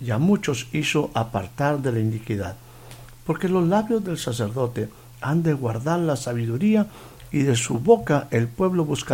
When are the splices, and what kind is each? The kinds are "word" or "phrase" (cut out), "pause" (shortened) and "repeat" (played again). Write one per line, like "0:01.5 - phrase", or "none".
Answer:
none